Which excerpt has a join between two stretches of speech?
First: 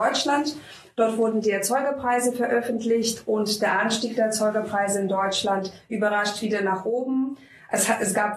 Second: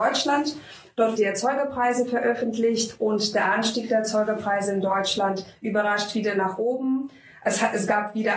second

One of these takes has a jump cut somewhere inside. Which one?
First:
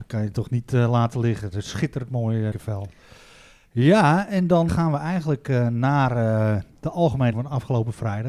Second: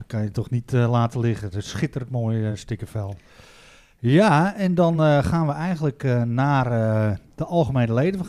first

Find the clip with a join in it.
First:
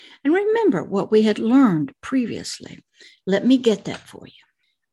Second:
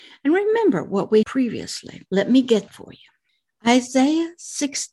second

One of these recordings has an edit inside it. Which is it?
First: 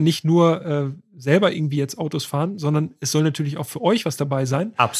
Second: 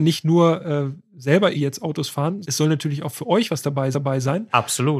second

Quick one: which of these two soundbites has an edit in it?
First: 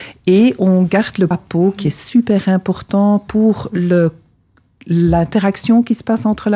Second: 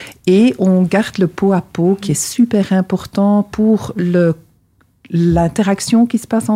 first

